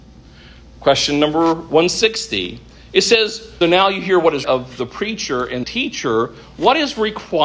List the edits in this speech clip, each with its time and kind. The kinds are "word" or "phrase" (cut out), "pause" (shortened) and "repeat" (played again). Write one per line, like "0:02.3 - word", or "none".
0:03.6 - word
0:04.4 - word
0:05.6 - word